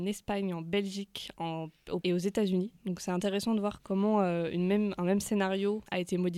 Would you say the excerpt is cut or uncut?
cut